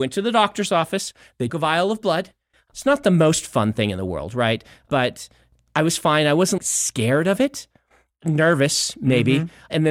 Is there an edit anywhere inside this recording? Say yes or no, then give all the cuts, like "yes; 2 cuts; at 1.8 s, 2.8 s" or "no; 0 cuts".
yes; 2 cuts; at 1.5 s, 6.6 s